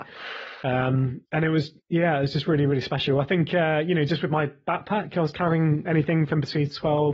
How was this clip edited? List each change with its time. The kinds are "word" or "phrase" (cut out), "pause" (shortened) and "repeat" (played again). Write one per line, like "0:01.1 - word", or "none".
0:01.2 - pause
0:01.8 - pause